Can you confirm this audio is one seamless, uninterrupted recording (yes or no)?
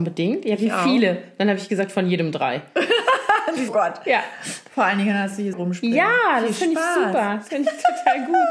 no